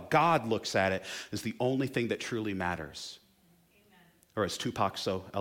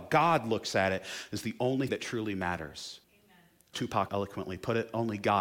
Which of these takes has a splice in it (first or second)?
second